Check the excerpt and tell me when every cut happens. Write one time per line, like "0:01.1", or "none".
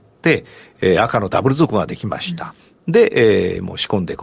none